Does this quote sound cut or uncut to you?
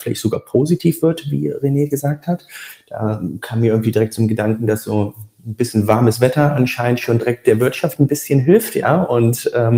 uncut